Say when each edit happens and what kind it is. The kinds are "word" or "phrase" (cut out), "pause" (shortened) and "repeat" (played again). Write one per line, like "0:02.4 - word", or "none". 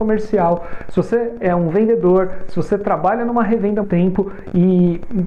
0:03.8 - word